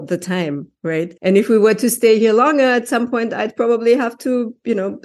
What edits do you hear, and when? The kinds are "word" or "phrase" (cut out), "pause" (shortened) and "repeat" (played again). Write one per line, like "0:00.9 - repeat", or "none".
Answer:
0:01.2 - pause